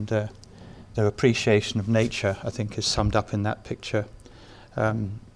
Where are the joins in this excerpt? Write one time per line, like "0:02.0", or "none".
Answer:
0:00.9

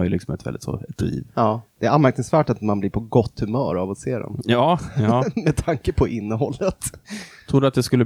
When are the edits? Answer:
0:01.3

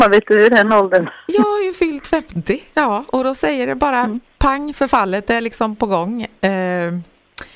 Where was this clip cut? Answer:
none

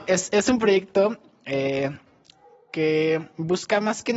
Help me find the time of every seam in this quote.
none

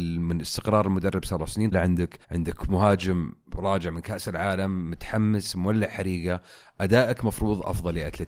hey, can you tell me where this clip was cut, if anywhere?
0:01.7
0:02.2

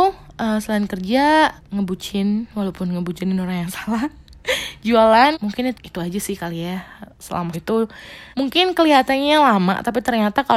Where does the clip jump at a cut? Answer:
0:01.6
0:05.3
0:05.7
0:07.5
0:08.3

